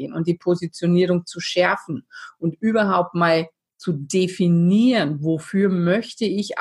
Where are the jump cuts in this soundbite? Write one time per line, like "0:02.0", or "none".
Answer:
none